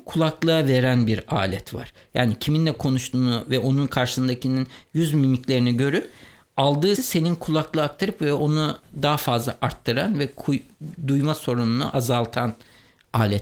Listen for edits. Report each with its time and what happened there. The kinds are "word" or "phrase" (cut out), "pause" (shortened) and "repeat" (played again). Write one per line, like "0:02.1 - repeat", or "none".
0:07.0 - word